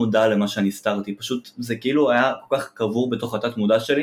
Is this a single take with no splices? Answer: yes; 0 cuts

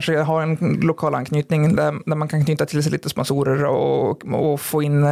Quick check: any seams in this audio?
no; 0 cuts

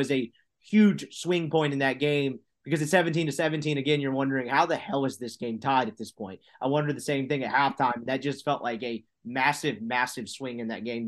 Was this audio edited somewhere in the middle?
no; 0 cuts

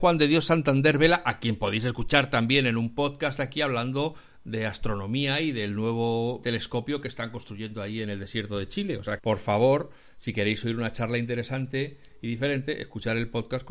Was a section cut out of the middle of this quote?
yes; 2 cuts; at 6.4 s, 9.2 s

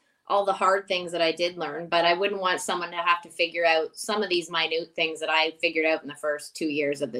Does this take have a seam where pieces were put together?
no; 0 cuts

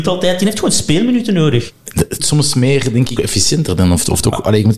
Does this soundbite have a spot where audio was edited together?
yes; 2 cuts; at 2.2 s, 3.2 s

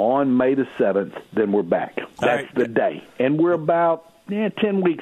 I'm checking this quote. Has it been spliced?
yes; 2 cuts; at 1.3 s, 2.1 s

